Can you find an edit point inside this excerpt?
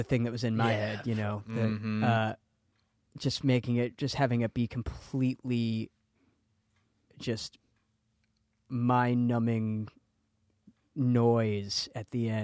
no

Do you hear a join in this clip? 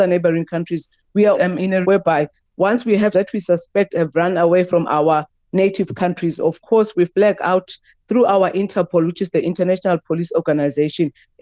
yes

